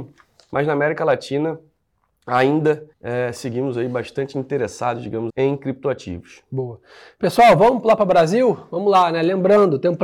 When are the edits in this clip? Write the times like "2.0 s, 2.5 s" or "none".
2.9 s, 5.3 s